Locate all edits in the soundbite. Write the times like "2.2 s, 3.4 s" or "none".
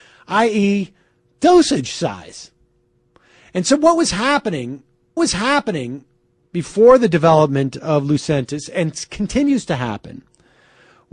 5.2 s